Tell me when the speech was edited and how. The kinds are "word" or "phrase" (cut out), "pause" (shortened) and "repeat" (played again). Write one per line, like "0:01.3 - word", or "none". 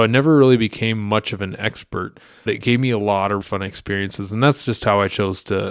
0:02.5 - word
0:03.4 - word